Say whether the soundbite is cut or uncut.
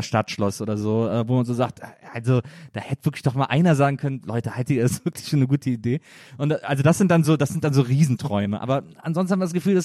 uncut